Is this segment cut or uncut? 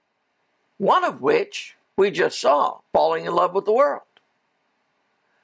cut